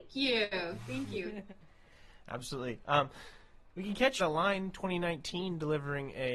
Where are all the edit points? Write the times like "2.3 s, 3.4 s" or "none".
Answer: 4.2 s